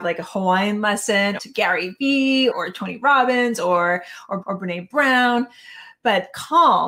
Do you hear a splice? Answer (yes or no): yes